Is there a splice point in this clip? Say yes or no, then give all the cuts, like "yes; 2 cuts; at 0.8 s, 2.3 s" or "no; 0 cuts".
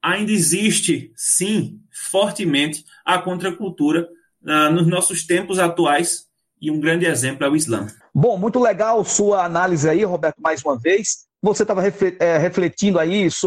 no; 0 cuts